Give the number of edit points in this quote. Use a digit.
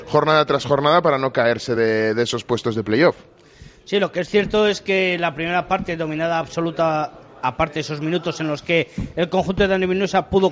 0